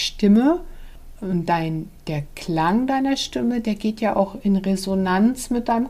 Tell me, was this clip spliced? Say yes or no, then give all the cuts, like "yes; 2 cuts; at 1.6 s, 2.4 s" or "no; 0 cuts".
no; 0 cuts